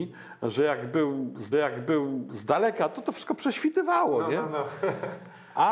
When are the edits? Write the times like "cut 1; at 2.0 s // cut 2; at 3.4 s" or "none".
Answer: cut 1; at 1.5 s